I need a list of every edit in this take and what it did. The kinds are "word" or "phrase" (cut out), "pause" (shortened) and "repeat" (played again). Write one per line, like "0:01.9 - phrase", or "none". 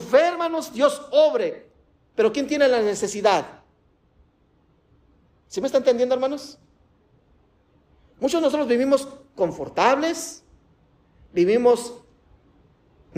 none